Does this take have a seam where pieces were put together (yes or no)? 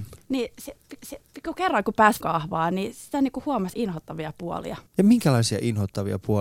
yes